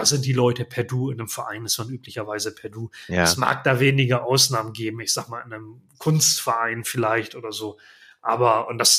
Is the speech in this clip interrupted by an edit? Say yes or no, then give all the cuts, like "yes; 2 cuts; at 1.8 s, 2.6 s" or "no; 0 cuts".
no; 0 cuts